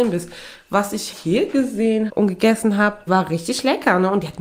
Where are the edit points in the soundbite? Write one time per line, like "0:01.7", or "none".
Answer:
0:01.1
0:02.1
0:03.1